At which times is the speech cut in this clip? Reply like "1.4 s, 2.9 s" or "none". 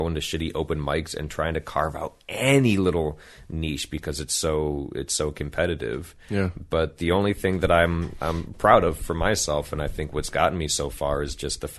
none